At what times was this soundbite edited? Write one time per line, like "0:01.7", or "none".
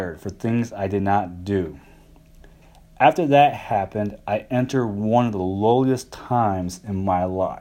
none